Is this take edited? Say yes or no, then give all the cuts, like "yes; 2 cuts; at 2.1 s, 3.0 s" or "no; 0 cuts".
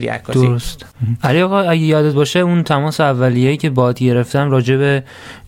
no; 0 cuts